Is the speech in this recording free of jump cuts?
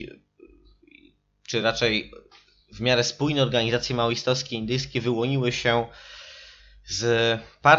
yes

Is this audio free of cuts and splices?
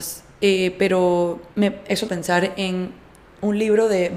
no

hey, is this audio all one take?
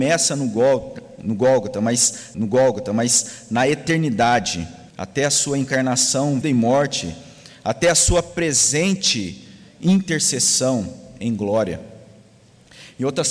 no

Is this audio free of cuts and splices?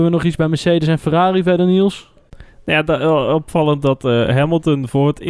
yes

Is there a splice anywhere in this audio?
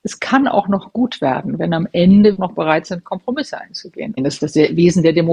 yes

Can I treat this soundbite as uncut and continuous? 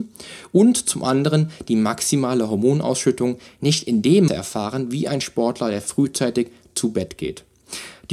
no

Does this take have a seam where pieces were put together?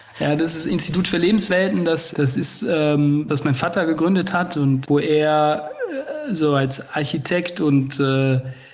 yes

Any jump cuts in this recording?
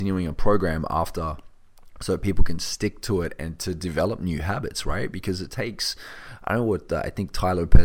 no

